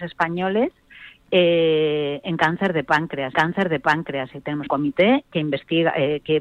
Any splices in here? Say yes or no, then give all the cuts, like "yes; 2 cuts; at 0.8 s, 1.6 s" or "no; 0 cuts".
yes; 2 cuts; at 3.3 s, 4.7 s